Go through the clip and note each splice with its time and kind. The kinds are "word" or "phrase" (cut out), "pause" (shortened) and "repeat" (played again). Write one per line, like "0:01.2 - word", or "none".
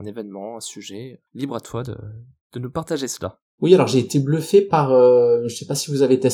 0:01.3 - pause